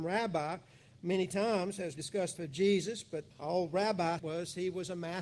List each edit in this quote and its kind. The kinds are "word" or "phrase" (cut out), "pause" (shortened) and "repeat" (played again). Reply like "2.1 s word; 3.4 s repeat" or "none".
2.0 s word; 2.4 s word; 3.3 s pause; 4.2 s phrase

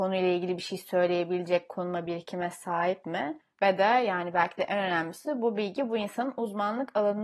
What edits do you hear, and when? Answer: none

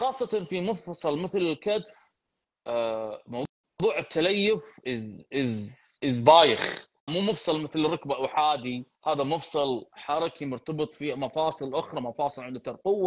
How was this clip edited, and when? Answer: 4.8 s word; 6.0 s pause; 7.1 s word; 8.9 s pause

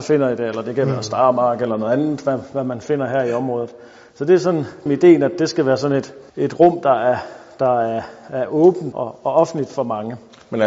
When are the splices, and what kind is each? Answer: 4.9 s phrase; 6.3 s pause; 8.9 s word

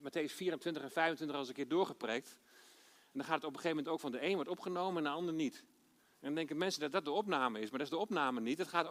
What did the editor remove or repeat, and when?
none

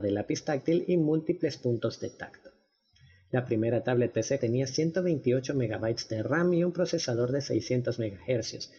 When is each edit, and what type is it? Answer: none

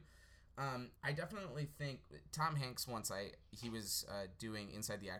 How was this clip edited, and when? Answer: 1.0 s pause

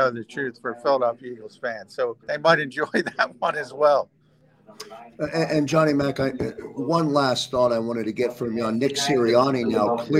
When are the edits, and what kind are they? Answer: 2.2 s pause

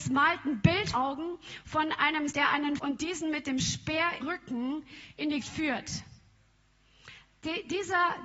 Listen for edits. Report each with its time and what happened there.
0.9 s word; 2.3 s word; 2.8 s phrase; 4.2 s word; 5.4 s word

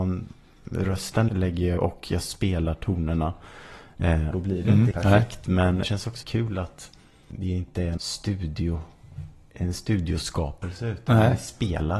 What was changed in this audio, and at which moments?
1.3 s word; 1.8 s word; 4.3 s word; 4.9 s word; 5.8 s word; 6.2 s word; 7.3 s word; 8.0 s word

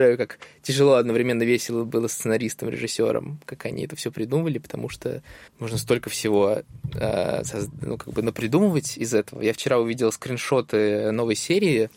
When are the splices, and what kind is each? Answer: 5.5 s pause

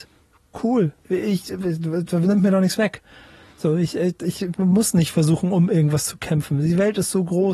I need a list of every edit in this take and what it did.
none

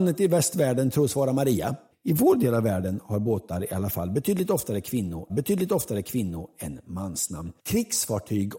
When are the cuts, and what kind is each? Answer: 1.9 s pause; 5.3 s repeat; 7.6 s pause

